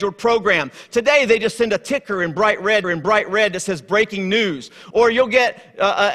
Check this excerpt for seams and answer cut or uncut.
cut